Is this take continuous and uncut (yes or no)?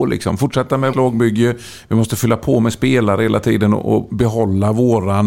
no